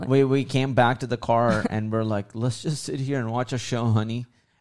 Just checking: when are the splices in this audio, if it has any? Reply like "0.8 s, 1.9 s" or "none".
none